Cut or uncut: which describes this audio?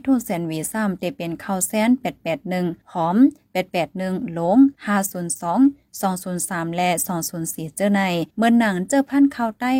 cut